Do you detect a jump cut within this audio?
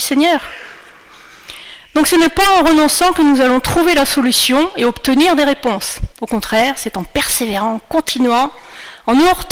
yes; 1 cut; at 6.1 s

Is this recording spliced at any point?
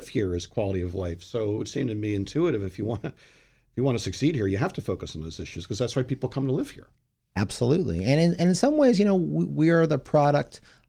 no; 0 cuts

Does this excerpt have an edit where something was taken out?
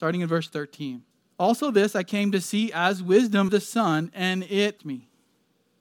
yes; 3 cuts; at 1.1 s, 3.5 s, 4.8 s

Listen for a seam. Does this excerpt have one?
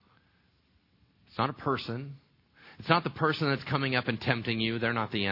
no; 0 cuts

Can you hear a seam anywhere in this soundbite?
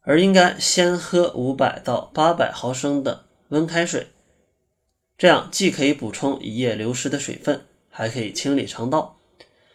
no; 0 cuts

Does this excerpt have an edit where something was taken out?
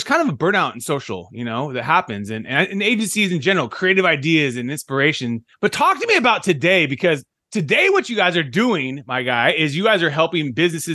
yes; 1 cut; at 5.5 s

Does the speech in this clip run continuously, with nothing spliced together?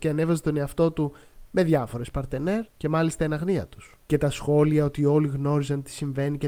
no; 2 cuts; at 2.7 s, 4.1 s

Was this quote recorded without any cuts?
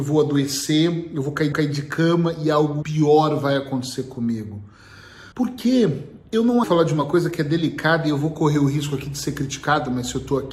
no; 4 cuts; at 1.5 s, 2.8 s, 5.3 s, 6.6 s

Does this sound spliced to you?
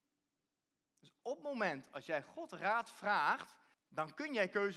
yes; 1 cut; at 3.7 s

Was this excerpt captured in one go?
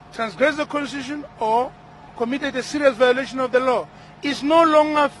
yes; 0 cuts

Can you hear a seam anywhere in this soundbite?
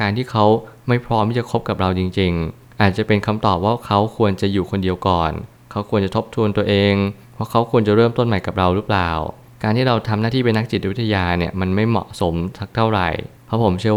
no; 0 cuts

